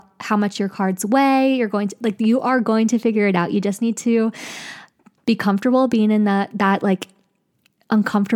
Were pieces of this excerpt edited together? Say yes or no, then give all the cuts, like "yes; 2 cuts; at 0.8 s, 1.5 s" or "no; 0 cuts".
no; 0 cuts